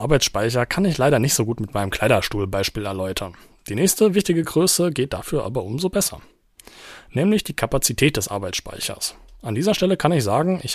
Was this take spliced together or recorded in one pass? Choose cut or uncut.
uncut